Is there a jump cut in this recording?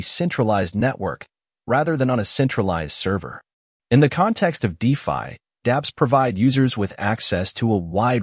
no; 0 cuts

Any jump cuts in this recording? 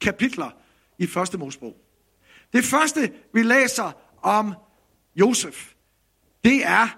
no; 0 cuts

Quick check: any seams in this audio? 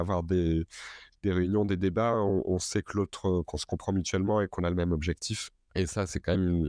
no; 0 cuts

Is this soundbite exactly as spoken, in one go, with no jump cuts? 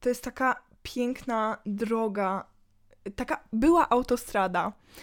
yes; 0 cuts

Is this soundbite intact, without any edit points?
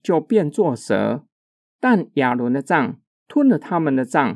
yes; 0 cuts

